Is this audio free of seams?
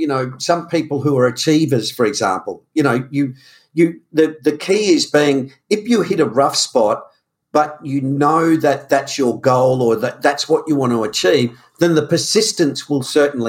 yes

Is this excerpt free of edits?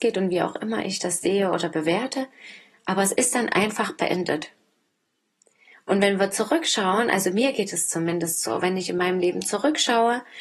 yes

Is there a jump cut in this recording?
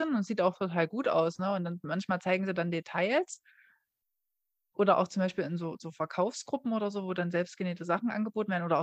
no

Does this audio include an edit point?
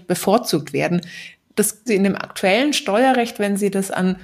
yes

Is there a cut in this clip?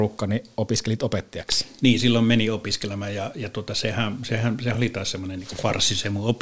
no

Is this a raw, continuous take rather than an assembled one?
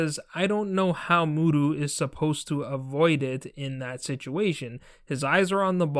yes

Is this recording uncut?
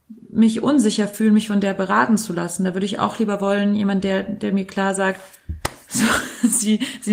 yes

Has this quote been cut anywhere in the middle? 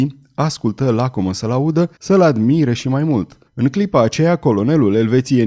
yes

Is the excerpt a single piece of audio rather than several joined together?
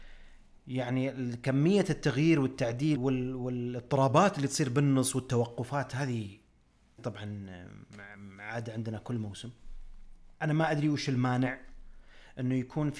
no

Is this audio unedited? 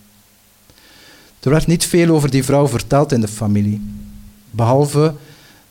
yes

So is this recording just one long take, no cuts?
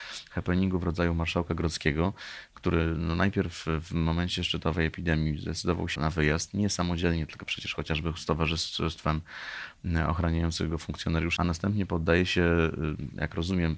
no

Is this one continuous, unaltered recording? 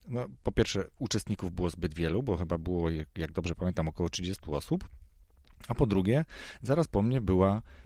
yes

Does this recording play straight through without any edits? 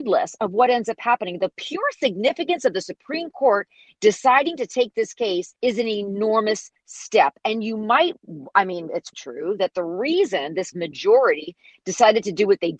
no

